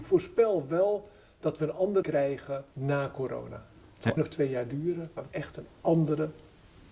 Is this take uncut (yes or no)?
no